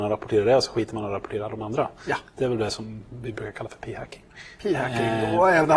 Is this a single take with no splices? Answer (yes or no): yes